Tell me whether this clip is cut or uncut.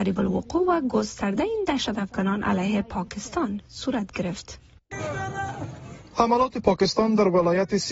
uncut